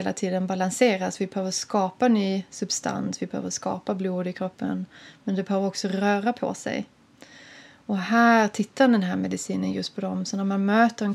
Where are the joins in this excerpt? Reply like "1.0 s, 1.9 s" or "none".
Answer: none